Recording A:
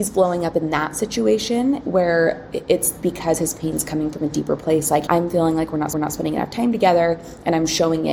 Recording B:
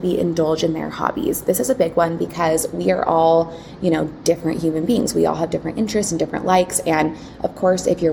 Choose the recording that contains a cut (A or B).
A